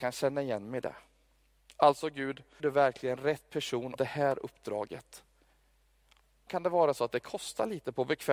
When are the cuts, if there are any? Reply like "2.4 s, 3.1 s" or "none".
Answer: 2.6 s, 3.9 s, 6.5 s